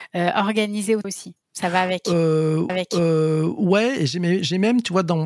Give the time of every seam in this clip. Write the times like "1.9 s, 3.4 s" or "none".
1.0 s, 1.4 s, 2.7 s